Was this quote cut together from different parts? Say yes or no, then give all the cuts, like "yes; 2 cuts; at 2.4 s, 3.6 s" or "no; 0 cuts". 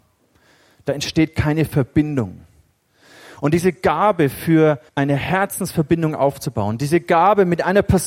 yes; 1 cut; at 4.9 s